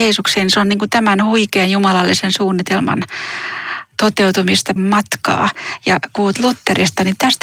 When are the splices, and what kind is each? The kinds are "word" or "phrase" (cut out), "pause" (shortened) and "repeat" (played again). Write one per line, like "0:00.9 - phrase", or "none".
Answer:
0:04.8 - word
0:06.2 - word